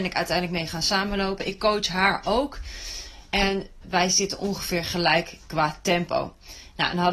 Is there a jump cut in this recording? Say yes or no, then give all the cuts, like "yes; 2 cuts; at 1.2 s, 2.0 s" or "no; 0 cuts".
yes; 1 cut; at 3.8 s